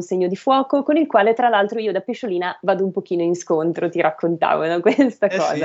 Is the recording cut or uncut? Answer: uncut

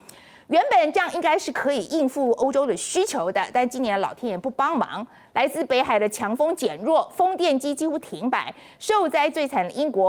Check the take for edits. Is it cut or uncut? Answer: uncut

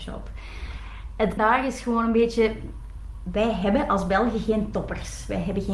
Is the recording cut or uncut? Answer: cut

